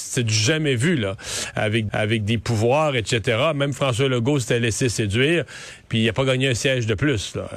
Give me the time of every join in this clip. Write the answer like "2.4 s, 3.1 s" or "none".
1.9 s